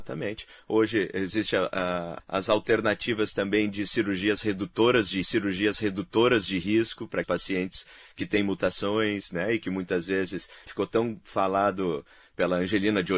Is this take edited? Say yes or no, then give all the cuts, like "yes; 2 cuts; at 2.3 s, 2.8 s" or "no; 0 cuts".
yes; 4 cuts; at 2.2 s, 5.2 s, 7.2 s, 10.7 s